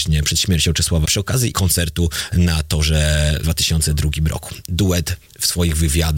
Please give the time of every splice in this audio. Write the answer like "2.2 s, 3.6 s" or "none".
1.0 s, 1.5 s, 3.4 s